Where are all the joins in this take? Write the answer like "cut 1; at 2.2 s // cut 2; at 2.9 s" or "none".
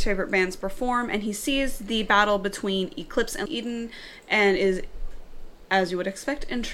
cut 1; at 3.5 s